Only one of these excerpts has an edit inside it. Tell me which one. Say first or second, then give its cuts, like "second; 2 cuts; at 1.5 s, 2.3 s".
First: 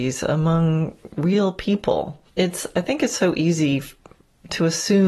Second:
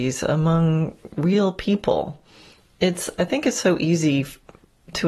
first; 1 cut; at 2.3 s